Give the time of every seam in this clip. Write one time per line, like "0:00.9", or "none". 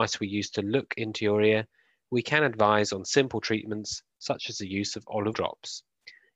0:05.3